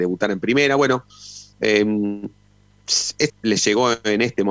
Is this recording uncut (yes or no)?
no